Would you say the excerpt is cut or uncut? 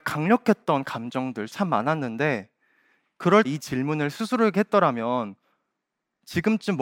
cut